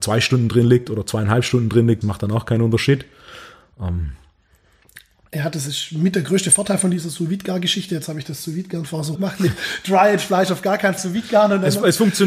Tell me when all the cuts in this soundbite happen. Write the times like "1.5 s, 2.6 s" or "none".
2.0 s, 9.1 s, 11.0 s